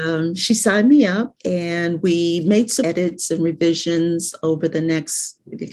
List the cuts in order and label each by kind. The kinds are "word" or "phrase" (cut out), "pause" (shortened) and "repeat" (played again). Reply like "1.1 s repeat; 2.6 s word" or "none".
1.4 s pause; 2.8 s word